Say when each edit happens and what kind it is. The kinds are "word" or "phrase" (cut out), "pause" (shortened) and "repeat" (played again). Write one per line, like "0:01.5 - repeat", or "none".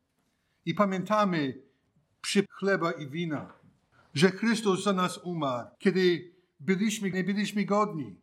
0:02.5 - word
0:03.9 - pause
0:05.7 - pause
0:07.1 - word